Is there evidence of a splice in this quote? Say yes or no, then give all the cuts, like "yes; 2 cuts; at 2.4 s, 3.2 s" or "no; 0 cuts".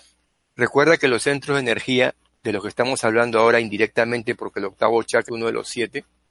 yes; 1 cut; at 5.3 s